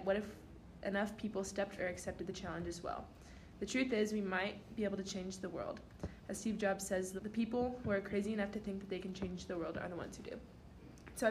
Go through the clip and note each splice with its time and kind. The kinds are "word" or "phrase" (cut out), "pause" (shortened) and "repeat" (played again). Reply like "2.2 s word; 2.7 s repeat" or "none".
1.8 s word; 7.2 s word